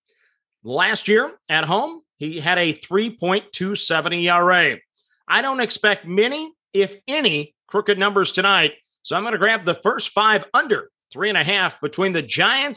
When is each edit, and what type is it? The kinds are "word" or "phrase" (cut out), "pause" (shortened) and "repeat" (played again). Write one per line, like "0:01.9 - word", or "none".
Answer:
none